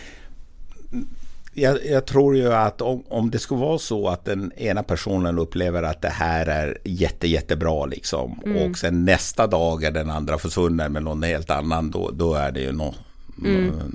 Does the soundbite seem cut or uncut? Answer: uncut